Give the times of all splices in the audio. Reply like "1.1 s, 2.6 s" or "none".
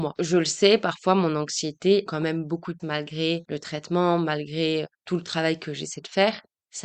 2.1 s, 2.8 s, 4.9 s